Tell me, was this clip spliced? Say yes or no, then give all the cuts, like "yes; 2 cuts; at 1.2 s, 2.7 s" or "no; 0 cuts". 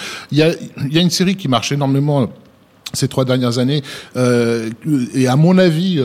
no; 0 cuts